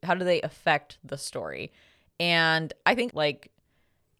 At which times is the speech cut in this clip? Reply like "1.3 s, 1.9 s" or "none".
3.1 s